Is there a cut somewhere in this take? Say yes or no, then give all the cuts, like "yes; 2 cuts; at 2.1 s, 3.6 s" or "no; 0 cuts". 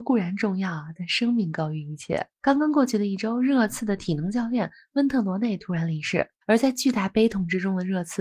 yes; 1 cut; at 6.4 s